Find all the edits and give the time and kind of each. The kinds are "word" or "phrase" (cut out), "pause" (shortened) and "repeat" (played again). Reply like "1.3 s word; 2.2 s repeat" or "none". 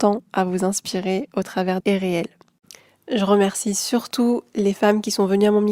1.8 s phrase